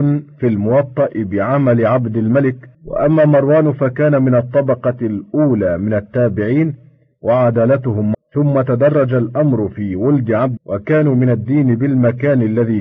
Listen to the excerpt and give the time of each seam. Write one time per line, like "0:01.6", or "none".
0:02.7
0:08.1
0:10.6